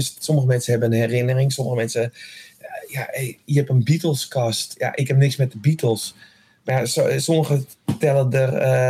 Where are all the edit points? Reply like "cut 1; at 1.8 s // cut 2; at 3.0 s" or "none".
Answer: none